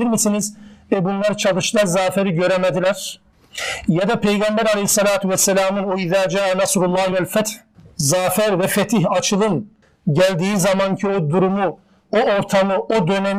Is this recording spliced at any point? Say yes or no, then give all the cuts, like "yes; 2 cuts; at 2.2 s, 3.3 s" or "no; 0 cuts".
no; 0 cuts